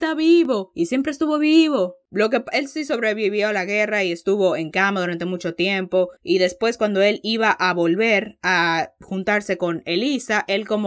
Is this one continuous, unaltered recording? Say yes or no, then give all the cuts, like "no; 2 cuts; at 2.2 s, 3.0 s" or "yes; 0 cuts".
no; 1 cut; at 6.2 s